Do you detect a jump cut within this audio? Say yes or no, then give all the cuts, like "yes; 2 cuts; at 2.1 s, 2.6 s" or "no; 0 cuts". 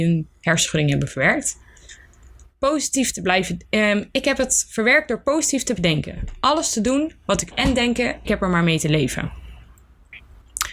yes; 3 cuts; at 5.8 s, 7.5 s, 8.2 s